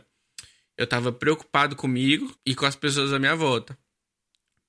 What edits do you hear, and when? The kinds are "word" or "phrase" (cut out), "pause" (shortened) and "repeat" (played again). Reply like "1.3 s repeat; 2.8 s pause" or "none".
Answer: 2.4 s pause